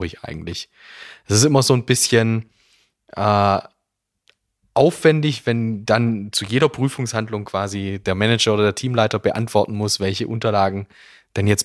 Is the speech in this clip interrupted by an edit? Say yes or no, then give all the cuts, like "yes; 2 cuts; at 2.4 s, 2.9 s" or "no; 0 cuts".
no; 0 cuts